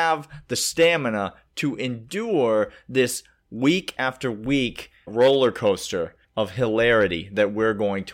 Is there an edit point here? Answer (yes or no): yes